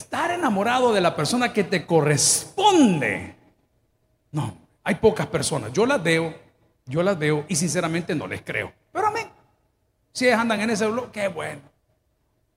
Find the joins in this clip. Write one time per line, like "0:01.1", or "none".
none